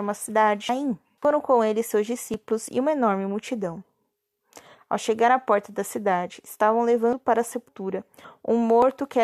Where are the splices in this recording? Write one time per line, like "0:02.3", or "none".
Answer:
none